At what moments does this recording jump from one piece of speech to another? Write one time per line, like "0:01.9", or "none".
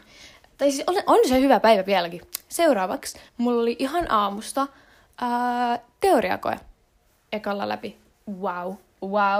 0:03.3